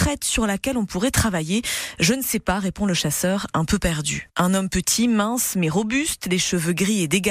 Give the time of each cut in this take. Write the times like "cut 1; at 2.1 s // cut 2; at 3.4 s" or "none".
none